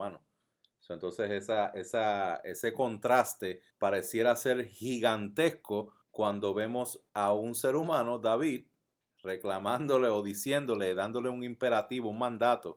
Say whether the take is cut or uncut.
cut